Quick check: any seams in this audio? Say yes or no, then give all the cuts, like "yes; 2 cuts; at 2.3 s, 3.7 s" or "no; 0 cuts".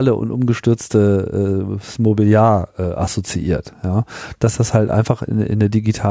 no; 0 cuts